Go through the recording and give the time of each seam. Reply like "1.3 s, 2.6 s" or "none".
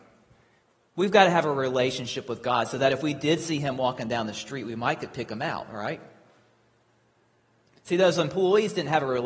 none